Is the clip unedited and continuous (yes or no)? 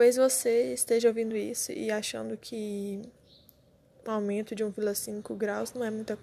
yes